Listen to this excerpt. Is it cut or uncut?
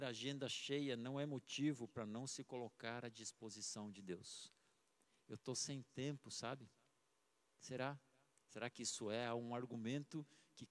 uncut